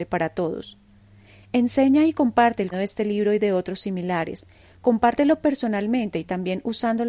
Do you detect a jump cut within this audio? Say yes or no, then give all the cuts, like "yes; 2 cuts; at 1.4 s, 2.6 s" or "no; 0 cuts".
yes; 1 cut; at 2.7 s